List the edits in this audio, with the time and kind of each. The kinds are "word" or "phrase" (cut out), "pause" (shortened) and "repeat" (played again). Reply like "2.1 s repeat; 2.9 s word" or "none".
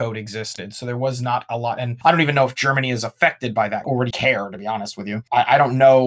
4.1 s word